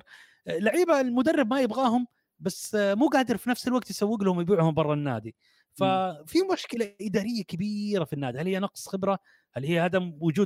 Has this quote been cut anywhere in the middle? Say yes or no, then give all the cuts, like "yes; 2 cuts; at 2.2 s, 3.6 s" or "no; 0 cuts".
no; 0 cuts